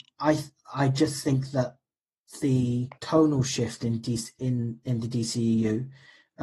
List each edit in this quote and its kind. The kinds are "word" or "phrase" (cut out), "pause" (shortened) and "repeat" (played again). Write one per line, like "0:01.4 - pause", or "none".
0:03.0 - pause

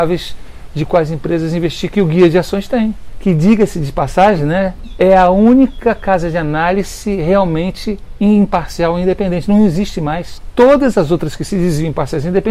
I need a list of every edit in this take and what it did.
none

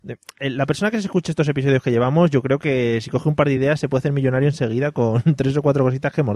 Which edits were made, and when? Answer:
none

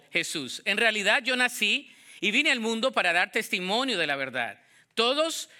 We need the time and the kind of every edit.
none

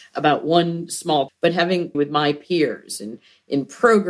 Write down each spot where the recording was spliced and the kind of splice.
0:01.3 - word
0:01.9 - word

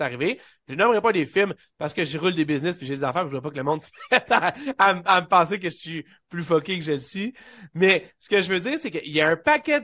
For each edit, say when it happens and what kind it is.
none

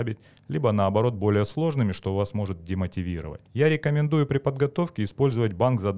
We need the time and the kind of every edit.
0:03.5 - pause

